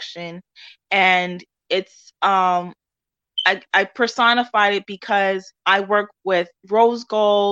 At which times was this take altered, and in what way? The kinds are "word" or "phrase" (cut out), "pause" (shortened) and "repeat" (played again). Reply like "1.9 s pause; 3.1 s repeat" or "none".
5.6 s pause; 6.6 s pause